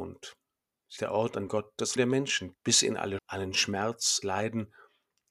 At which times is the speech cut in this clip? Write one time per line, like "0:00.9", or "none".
0:01.0
0:01.5
0:02.0
0:02.5
0:03.2
0:04.2